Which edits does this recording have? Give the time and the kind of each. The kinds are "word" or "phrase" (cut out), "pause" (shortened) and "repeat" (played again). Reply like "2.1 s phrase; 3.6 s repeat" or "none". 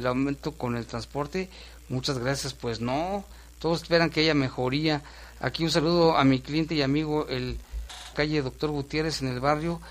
8.1 s phrase